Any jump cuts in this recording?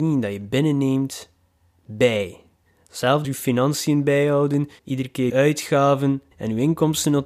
yes; 4 cuts; at 3.2 s, 4.8 s, 5.3 s, 6.3 s

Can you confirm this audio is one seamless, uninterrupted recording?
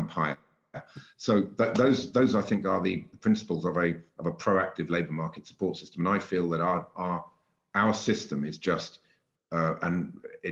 no; 1 cut; at 4.1 s

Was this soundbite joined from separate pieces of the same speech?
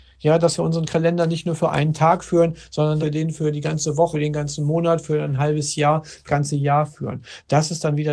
yes; 3 cuts; at 3.0 s, 4.1 s, 6.3 s

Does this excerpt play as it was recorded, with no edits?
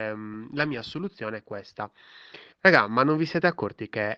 no; 1 cut; at 2.5 s

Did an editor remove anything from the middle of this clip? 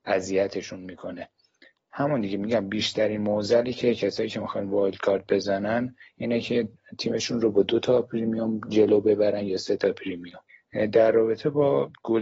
no; 0 cuts

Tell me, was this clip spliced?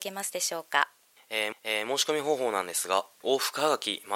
yes; 1 cut; at 1.5 s

